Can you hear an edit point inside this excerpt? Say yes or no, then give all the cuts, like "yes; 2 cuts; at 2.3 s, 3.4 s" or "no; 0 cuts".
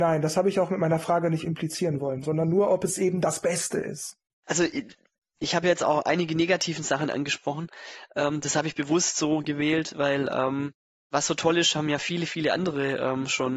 no; 0 cuts